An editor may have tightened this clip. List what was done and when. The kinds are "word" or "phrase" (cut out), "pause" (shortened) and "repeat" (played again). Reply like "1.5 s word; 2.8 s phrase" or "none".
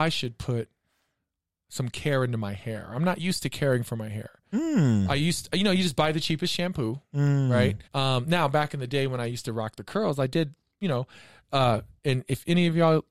7.9 s pause